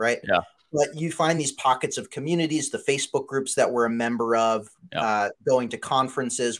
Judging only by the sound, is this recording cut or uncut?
uncut